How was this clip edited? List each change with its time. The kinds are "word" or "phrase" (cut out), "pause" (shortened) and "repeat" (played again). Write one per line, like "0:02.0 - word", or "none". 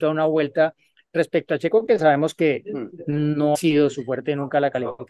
0:03.5 - word